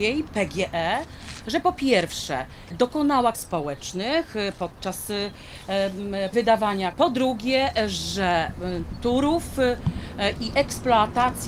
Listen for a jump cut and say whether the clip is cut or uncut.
cut